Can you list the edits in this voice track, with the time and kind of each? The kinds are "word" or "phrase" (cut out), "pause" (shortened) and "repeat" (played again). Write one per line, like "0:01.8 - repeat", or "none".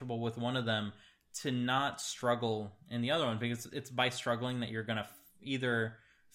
none